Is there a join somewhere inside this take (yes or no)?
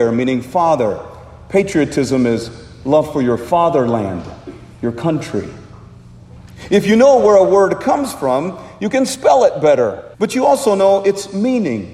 yes